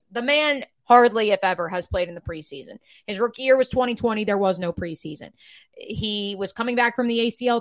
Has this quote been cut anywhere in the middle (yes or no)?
no